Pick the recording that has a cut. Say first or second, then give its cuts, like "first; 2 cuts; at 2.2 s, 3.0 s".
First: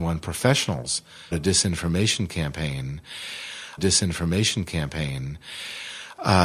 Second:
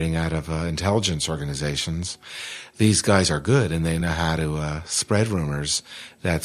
first; 2 cuts; at 1.3 s, 3.8 s